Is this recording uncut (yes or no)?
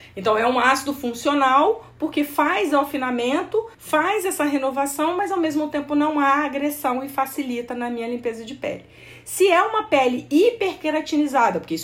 no